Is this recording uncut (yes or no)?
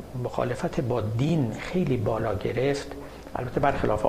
yes